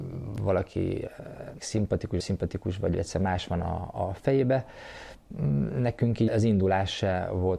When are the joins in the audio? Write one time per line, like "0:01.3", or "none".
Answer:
0:01.6
0:02.2
0:03.9
0:06.3